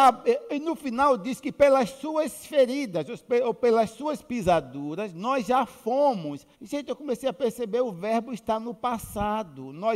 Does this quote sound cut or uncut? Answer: cut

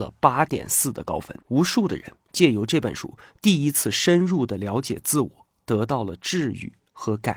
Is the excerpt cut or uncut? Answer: cut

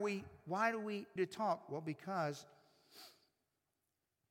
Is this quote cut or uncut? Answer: cut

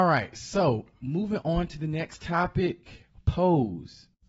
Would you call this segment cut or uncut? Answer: uncut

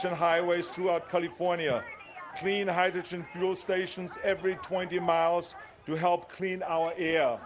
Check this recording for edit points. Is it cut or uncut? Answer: cut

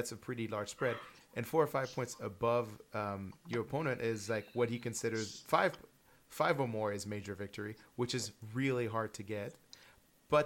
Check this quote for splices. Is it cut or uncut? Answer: uncut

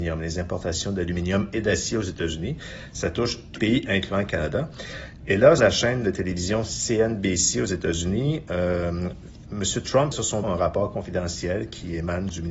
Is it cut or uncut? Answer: cut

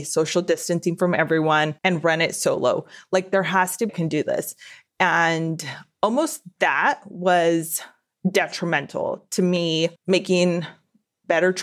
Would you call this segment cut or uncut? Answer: cut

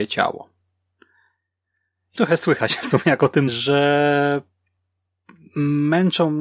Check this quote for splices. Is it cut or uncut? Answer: cut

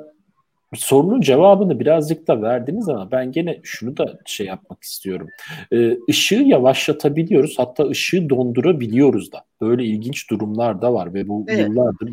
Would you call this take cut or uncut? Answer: uncut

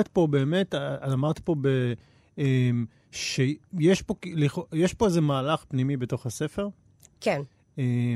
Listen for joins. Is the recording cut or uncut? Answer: uncut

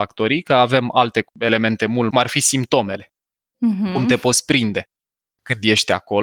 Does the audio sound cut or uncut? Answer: cut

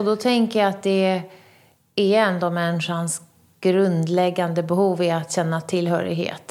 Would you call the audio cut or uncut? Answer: uncut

